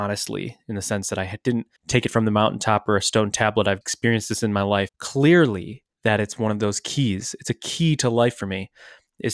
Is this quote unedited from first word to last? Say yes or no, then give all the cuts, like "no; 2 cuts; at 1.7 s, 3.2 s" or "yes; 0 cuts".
no; 4 cuts; at 1.8 s, 3.8 s, 4.9 s, 5.9 s